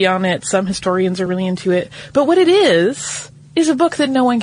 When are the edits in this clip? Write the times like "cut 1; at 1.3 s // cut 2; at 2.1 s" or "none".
none